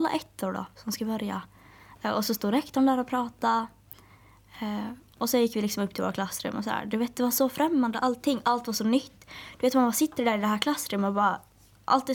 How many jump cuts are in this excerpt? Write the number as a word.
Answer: zero